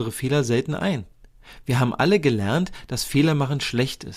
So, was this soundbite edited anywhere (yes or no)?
no